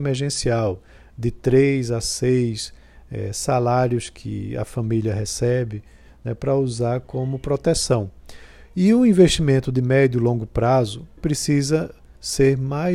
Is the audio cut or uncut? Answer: cut